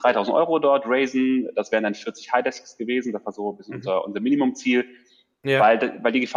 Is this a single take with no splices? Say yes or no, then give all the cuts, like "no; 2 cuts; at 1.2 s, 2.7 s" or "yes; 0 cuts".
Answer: yes; 0 cuts